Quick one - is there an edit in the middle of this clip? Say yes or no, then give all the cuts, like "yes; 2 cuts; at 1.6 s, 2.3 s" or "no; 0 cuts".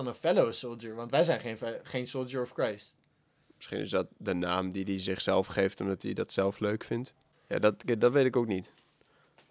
no; 0 cuts